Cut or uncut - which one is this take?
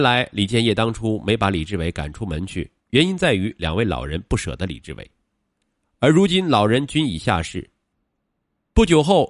cut